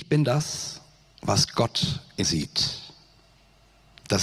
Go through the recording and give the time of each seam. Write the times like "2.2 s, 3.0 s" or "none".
2.2 s